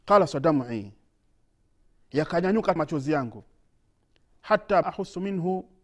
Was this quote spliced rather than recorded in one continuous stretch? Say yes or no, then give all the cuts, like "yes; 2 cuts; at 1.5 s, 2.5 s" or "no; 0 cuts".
yes; 2 cuts; at 2.8 s, 4.8 s